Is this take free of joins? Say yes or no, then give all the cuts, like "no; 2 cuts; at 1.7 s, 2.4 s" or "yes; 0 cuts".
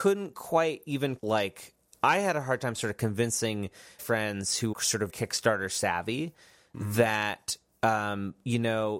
no; 4 cuts; at 1.2 s, 4.0 s, 4.7 s, 5.1 s